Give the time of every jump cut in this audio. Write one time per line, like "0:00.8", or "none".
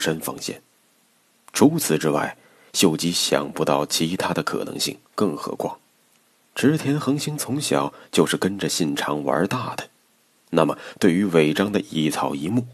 0:05.0

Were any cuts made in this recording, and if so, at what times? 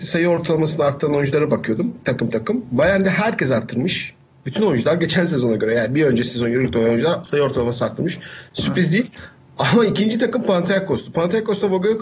none

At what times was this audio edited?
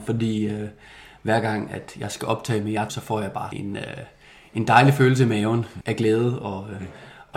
0:02.9
0:03.5
0:05.8

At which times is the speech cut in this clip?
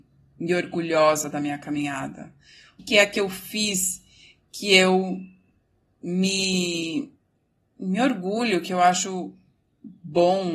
0:02.8

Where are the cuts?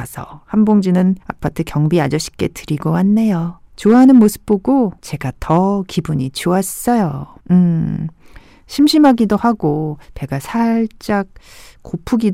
0:01.2
0:03.7
0:05.0
0:07.4
0:10.0

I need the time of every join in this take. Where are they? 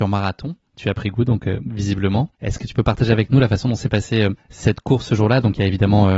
0:02.3
0:04.4

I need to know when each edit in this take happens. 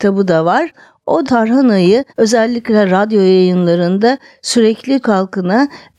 0:01.2
0:02.1
0:05.0

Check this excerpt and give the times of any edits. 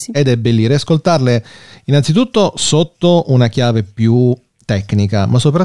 none

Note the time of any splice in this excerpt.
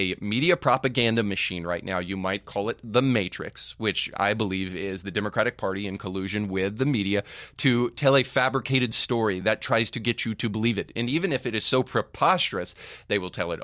none

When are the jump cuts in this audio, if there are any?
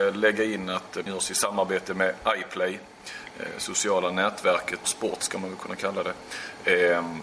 0:01.1
0:04.8

